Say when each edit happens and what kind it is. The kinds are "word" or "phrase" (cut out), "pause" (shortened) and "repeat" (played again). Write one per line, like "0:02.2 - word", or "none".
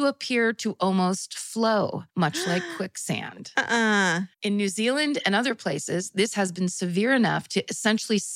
0:02.1 - pause
0:04.3 - pause